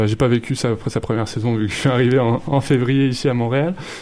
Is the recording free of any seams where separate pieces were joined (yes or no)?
yes